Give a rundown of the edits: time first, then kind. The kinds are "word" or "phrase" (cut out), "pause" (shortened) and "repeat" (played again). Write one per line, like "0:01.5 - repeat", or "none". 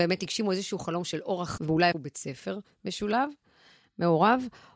0:01.6 - word
0:01.9 - phrase